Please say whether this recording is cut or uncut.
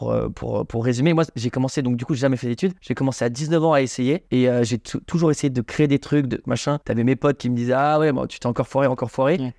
cut